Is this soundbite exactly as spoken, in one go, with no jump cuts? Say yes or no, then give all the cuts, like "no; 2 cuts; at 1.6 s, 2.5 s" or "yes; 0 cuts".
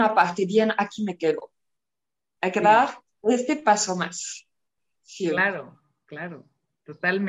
yes; 0 cuts